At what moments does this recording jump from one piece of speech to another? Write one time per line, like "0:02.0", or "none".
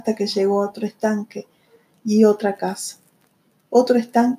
none